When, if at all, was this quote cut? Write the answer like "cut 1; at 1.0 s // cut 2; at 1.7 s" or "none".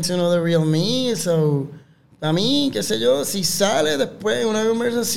none